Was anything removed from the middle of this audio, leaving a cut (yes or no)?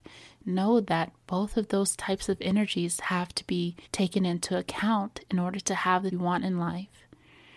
yes